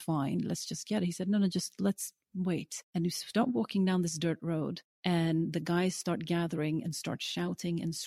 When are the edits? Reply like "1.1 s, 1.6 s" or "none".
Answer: 2.8 s, 4.9 s